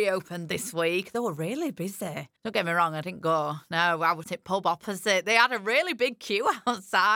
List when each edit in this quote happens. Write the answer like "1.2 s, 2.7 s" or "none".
2.4 s, 4.2 s